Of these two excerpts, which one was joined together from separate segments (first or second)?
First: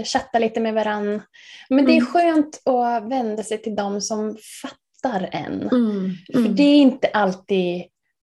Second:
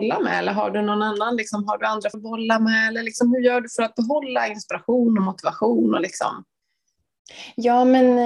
second